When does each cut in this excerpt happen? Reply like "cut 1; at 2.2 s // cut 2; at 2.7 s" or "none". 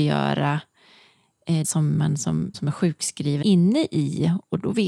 cut 1; at 1.6 s // cut 2; at 2.5 s // cut 3; at 3.4 s